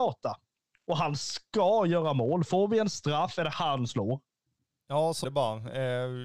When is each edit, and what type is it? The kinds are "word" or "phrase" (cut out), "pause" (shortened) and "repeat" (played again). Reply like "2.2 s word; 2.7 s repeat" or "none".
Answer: 3.9 s word; 5.2 s word

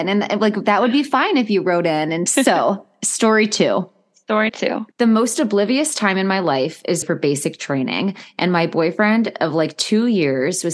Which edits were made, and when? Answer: 2.3 s phrase; 4.5 s word; 4.9 s pause; 7.0 s phrase

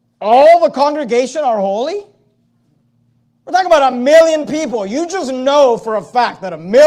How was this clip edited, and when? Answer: none

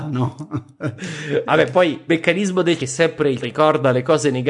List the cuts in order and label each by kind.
2.1 s word; 2.8 s phrase; 3.4 s word

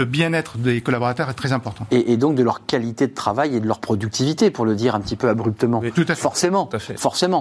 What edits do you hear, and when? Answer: none

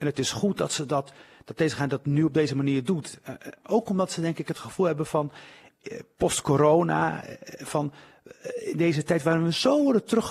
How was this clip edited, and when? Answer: none

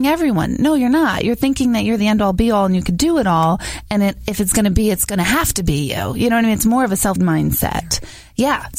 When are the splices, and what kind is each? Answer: 7.2 s word

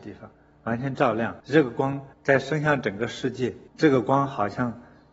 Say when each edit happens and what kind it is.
1.4 s pause; 2.1 s pause; 3.7 s pause

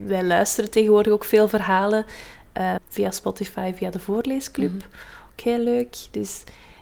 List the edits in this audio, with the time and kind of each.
2.8 s word

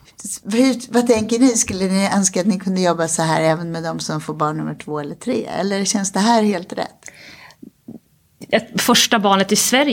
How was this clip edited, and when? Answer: none

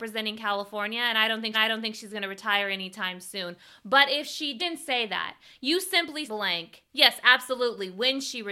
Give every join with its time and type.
1.5 s repeat; 4.6 s phrase; 6.3 s phrase; 6.9 s pause

